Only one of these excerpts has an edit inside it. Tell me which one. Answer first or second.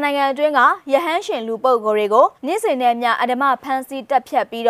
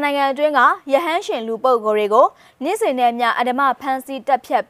first